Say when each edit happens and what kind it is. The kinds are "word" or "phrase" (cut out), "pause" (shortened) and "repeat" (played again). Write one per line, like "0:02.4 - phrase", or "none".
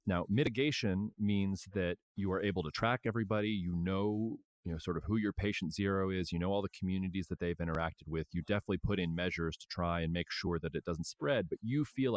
0:02.0 - pause

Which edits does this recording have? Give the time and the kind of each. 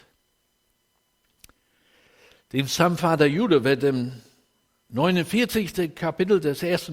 none

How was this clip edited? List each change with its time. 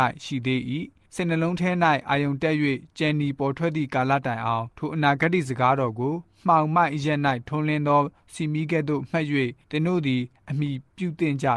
0:04.7 - pause

